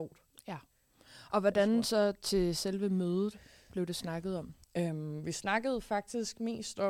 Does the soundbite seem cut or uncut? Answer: cut